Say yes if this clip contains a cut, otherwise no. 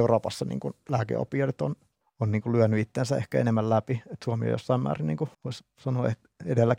yes